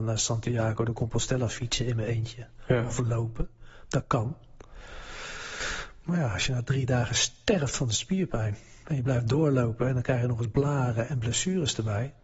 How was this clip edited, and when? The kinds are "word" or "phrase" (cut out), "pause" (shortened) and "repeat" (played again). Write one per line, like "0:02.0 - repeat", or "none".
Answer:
none